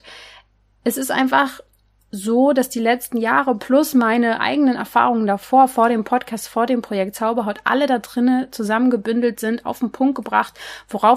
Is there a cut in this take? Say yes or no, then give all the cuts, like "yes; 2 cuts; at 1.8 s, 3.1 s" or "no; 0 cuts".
no; 0 cuts